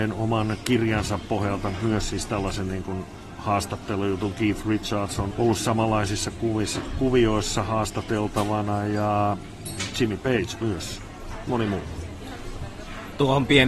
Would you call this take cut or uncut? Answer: cut